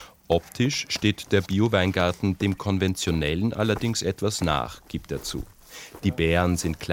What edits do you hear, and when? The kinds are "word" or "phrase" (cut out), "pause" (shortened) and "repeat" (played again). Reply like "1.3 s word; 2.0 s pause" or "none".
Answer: none